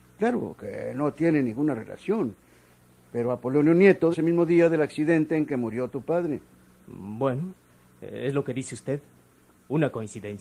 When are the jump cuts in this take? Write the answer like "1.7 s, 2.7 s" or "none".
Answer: 4.1 s